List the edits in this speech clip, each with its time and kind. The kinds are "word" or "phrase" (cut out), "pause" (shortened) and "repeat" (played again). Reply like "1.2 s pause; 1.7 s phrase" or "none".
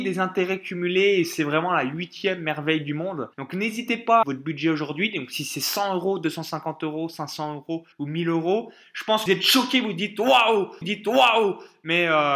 3.3 s pause; 4.2 s phrase; 7.9 s pause; 9.3 s phrase; 10.8 s repeat